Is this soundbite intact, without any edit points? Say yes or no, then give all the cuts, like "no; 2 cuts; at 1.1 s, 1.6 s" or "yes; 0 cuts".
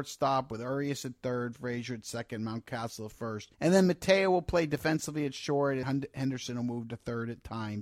no; 2 cuts; at 3.5 s, 5.8 s